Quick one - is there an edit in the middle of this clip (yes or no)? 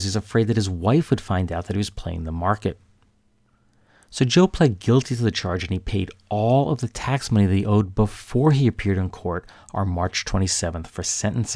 no